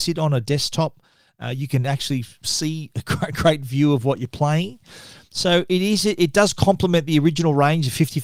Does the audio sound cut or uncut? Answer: uncut